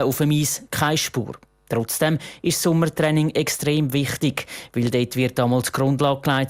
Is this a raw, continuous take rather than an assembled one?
yes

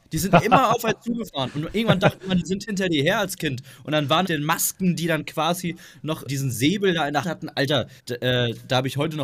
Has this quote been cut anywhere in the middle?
yes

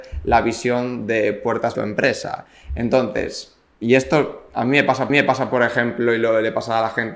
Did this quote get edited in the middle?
yes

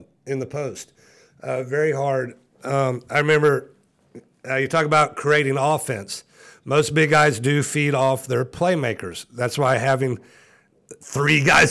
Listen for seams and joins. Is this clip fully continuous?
yes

